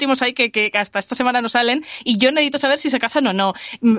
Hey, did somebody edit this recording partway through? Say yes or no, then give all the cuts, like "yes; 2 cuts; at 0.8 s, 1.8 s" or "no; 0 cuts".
no; 0 cuts